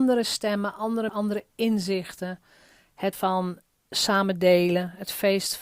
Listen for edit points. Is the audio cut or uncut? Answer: cut